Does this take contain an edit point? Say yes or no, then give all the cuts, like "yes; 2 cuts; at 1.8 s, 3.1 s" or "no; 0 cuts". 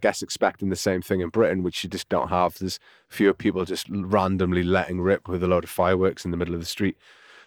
no; 0 cuts